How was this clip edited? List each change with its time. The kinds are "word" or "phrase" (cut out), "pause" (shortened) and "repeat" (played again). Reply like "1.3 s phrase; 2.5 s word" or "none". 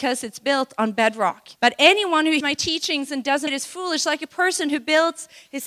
1.6 s pause; 2.4 s word; 3.5 s word